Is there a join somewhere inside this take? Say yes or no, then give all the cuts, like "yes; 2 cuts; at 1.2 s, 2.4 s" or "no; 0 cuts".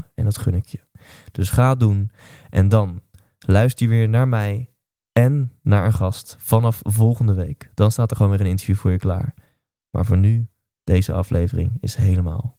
no; 0 cuts